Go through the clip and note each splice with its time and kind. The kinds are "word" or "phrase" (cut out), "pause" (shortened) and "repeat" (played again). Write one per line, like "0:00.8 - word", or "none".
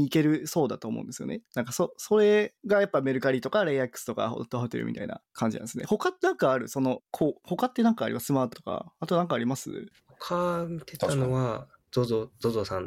0:02.6 - pause
0:05.3 - pause
0:07.1 - pause
0:08.5 - word